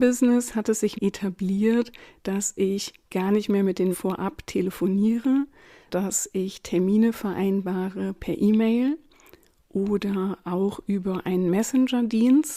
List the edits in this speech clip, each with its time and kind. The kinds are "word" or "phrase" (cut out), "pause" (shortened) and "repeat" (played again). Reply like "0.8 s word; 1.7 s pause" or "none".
0.9 s word; 3.9 s word; 5.9 s word